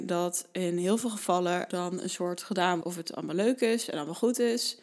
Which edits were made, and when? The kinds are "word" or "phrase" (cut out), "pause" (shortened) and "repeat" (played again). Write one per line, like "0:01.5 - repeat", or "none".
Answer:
0:01.7 - word
0:02.8 - word